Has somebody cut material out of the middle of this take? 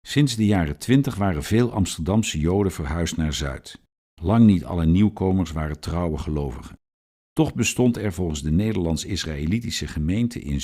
no; 0 cuts

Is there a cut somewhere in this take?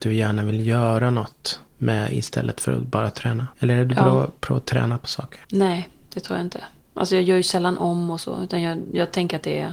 yes; 2 cuts; at 3.5 s, 5.4 s

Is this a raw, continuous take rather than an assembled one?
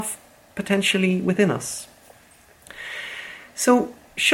yes; 0 cuts

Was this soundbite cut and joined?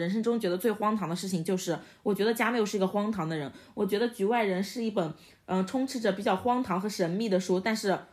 no; 0 cuts

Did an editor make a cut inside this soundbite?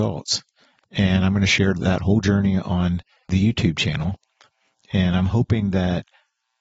no; 0 cuts

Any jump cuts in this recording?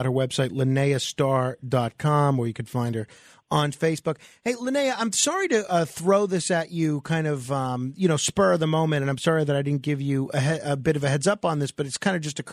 no; 0 cuts

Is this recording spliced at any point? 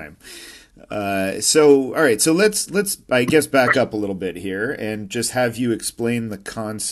no; 0 cuts

